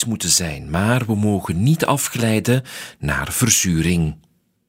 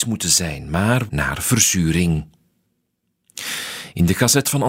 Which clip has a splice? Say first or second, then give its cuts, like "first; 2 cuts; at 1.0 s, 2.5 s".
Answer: second; 1 cut; at 1.1 s